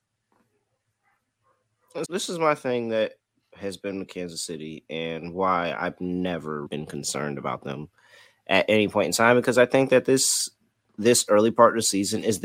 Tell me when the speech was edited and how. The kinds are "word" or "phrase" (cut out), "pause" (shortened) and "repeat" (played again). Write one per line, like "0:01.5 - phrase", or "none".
0:02.0 - word
0:06.6 - word